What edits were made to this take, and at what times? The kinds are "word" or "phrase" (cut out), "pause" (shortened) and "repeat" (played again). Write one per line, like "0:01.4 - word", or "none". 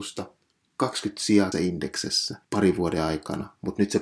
0:01.5 - word
0:02.4 - pause